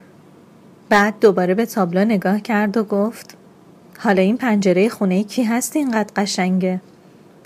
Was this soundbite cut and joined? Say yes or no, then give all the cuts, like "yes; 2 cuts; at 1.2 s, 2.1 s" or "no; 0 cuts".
no; 0 cuts